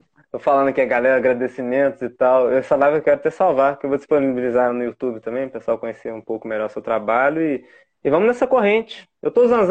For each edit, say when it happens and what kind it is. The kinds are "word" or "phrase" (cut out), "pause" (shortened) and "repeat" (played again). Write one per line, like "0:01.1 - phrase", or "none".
none